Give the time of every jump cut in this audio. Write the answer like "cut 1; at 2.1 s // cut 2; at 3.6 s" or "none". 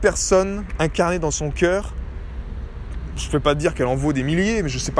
none